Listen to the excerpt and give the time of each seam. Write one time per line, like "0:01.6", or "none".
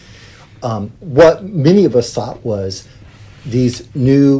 0:01.0